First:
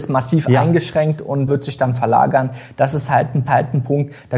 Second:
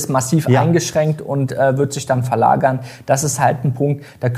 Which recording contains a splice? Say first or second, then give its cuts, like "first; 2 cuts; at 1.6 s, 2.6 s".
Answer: first; 2 cuts; at 1.5 s, 3.5 s